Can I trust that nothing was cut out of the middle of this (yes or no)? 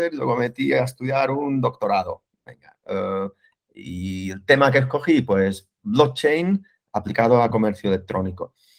yes